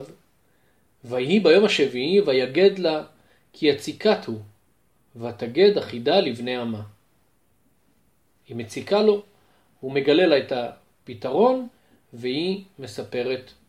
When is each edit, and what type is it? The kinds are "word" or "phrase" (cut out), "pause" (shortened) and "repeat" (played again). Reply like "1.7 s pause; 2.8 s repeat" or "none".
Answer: none